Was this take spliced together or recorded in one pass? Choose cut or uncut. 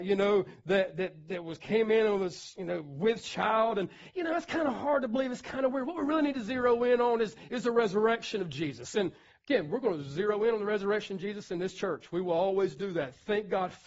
uncut